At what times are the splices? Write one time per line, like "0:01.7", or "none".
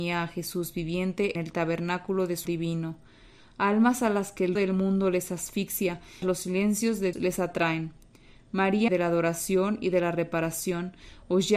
0:01.4
0:02.5
0:04.6
0:06.2
0:07.1
0:08.9